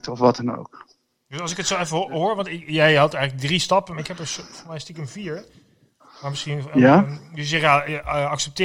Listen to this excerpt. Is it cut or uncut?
uncut